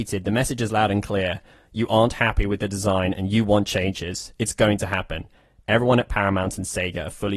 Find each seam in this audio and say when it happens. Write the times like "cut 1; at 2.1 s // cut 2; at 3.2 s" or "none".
none